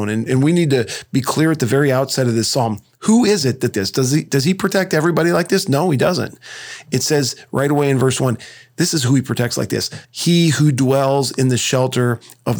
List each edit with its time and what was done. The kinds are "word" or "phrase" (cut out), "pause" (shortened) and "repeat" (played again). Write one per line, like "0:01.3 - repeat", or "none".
0:03.7 - phrase
0:10.0 - pause